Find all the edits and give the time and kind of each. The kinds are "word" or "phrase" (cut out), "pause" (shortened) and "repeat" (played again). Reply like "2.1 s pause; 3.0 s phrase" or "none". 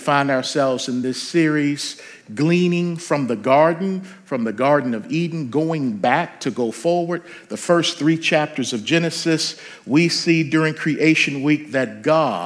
none